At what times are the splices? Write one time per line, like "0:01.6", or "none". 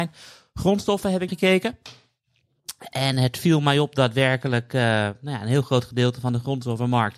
0:01.3